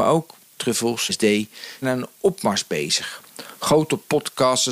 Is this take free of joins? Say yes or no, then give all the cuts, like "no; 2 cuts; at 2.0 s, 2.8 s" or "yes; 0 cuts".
no; 2 cuts; at 1.1 s, 1.8 s